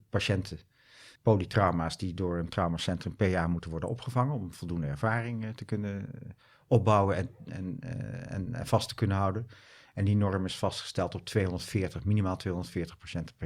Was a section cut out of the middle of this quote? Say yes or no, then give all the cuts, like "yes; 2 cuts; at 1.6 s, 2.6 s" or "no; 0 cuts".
yes; 1 cut; at 1.2 s